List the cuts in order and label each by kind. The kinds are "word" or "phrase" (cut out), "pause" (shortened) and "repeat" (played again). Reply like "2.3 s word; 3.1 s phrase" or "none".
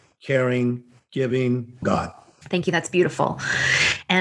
1.8 s word